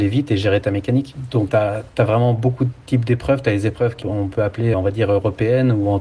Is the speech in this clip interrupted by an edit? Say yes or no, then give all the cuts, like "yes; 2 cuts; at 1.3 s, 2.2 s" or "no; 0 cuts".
yes; 3 cuts; at 1.5 s, 4.0 s, 4.7 s